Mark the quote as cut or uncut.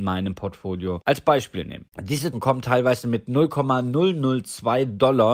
cut